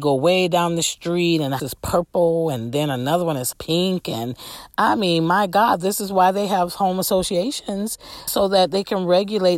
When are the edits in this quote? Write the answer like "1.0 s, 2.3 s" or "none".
1.6 s, 3.5 s, 8.3 s